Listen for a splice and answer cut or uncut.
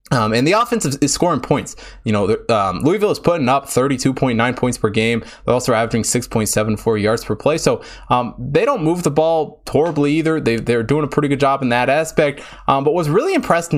uncut